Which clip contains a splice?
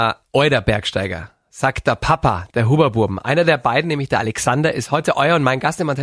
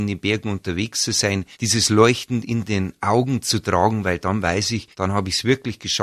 second; 2 cuts; at 1.5 s, 4.9 s

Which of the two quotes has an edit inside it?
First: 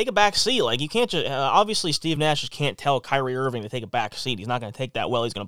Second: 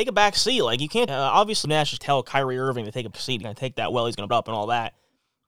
second; 6 cuts; at 1.1 s, 1.6 s, 2.0 s, 3.1 s, 3.4 s, 4.3 s

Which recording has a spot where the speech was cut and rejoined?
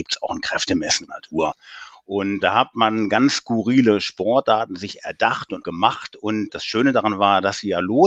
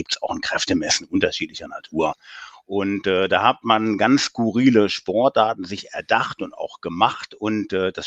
first; 4 cuts; at 1.1 s, 2.4 s, 5.6 s, 6.5 s

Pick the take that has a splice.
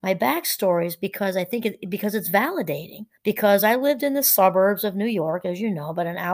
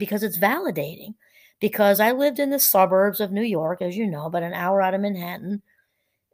first; 1 cut; at 3.2 s

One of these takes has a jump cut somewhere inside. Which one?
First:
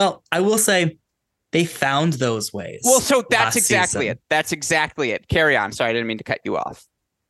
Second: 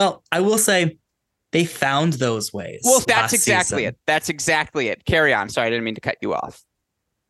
second; 1 cut; at 3.0 s

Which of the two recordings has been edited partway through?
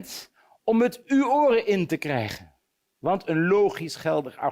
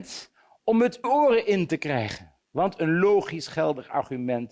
second; 2 cuts; at 1.0 s, 2.4 s

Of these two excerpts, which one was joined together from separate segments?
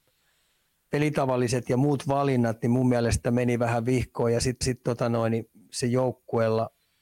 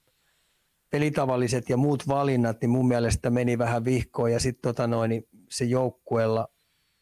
first; 1 cut; at 4.6 s

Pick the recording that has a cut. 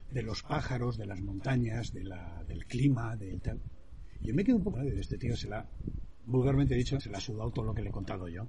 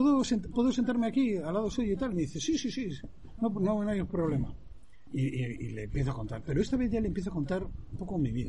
first; 2 cuts; at 4.7 s, 7.0 s

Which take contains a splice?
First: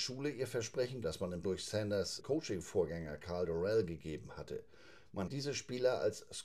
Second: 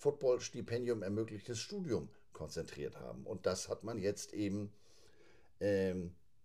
first; 4 cuts; at 1.0 s, 1.4 s, 2.2 s, 5.3 s

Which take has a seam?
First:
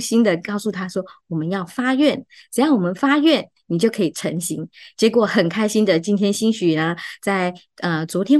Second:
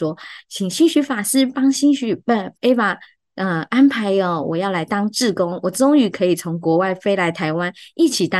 second; 1 cut; at 2.5 s

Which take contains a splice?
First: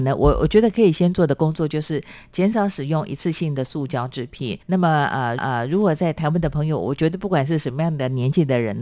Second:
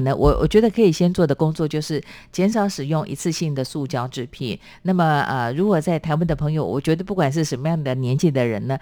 first; 2 cuts; at 4.6 s, 5.4 s

